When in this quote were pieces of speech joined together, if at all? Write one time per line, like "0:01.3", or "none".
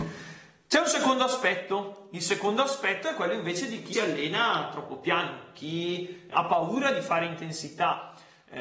0:03.9
0:06.3